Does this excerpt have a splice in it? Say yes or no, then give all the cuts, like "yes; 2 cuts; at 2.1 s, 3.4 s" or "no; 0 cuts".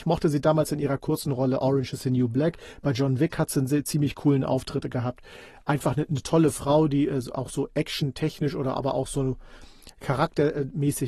no; 0 cuts